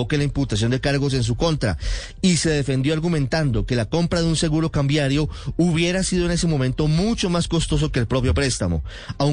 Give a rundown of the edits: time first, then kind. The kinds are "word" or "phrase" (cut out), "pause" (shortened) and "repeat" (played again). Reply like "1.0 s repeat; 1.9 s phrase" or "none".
none